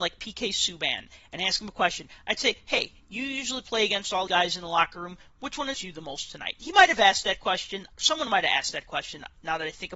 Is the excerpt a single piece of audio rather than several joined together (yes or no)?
no